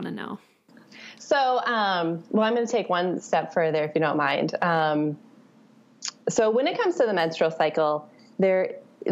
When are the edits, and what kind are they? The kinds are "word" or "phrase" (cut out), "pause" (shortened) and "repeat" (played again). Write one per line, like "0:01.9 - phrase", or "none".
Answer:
0:06.2 - pause